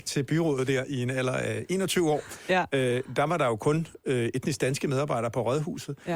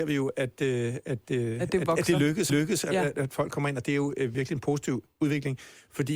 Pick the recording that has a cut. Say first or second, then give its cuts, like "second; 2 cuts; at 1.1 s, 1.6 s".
second; 2 cuts; at 2.5 s, 4.3 s